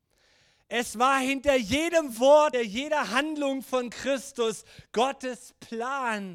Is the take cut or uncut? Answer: cut